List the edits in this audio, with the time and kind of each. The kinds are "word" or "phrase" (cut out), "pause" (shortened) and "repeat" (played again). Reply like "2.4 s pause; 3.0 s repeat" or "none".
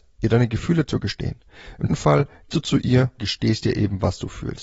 1.9 s word; 2.5 s word; 3.2 s word